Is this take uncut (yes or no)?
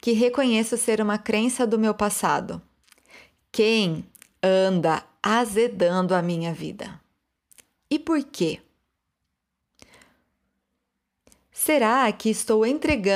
no